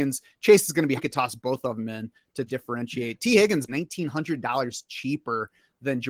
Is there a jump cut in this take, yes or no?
yes